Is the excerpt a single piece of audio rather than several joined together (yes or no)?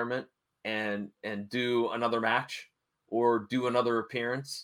yes